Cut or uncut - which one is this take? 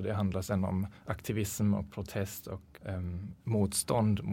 cut